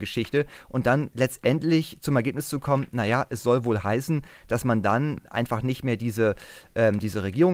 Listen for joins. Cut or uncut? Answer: uncut